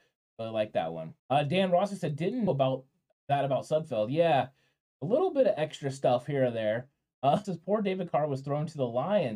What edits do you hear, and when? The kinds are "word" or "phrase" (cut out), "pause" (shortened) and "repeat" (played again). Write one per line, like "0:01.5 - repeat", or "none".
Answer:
0:01.2 - pause
0:02.5 - word
0:07.4 - phrase